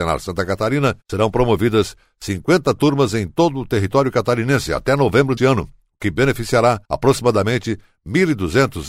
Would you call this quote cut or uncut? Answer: cut